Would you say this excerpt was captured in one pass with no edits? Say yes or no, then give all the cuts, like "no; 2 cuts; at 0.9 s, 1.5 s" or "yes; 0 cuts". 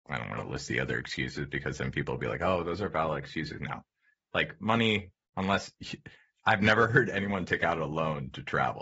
yes; 0 cuts